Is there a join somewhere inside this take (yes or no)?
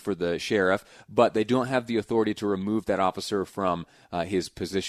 no